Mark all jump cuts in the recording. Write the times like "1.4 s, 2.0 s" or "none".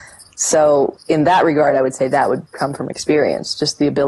none